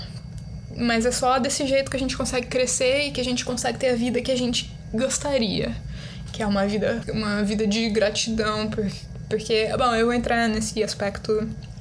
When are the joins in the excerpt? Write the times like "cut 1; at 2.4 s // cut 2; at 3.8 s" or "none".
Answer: cut 1; at 7.0 s